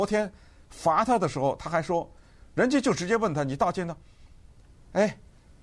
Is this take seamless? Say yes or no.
yes